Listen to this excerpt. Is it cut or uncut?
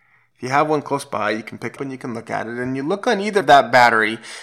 cut